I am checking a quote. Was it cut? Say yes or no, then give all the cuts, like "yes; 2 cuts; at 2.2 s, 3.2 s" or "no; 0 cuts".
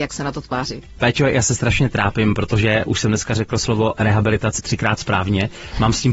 yes; 1 cut; at 4.6 s